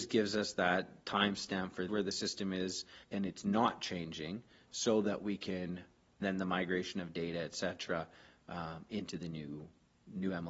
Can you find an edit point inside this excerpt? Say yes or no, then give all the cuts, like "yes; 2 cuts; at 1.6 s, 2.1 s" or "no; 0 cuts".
yes; 3 cuts; at 1.9 s, 3.0 s, 6.2 s